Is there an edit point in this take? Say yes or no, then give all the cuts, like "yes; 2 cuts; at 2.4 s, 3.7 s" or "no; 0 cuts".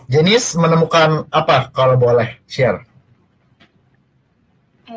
yes; 1 cut; at 2.4 s